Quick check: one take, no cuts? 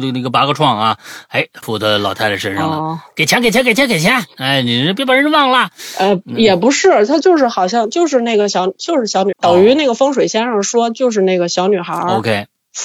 no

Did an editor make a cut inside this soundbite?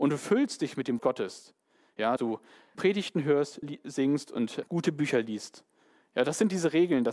yes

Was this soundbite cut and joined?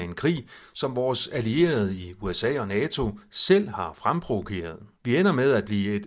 yes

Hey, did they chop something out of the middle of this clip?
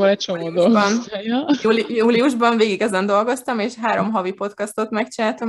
no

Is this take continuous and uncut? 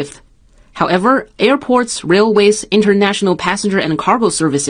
yes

